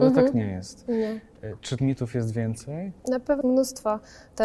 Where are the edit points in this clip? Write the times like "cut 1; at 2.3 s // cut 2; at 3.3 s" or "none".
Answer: cut 1; at 1.8 s // cut 2; at 3.0 s // cut 3; at 3.4 s